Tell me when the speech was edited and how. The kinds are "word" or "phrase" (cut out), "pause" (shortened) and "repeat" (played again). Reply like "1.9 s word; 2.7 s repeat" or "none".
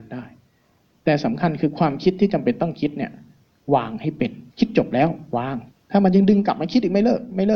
4.5 s pause; 5.7 s pause